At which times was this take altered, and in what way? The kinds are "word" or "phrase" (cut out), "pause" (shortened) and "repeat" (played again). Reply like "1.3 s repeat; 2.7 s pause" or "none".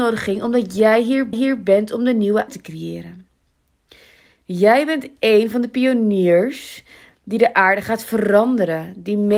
1.3 s repeat; 2.5 s word